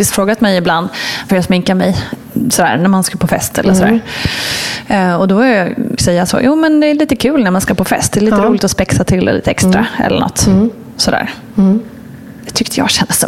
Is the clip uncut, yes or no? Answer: no